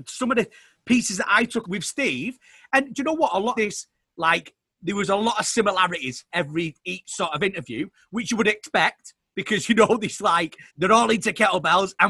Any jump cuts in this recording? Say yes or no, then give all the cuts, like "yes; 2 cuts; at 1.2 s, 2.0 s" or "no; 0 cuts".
yes; 4 cuts; at 1.6 s, 3.5 s, 6.3 s, 10.7 s